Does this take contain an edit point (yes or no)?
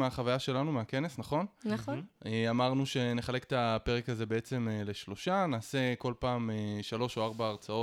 no